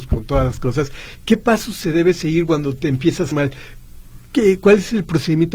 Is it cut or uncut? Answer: cut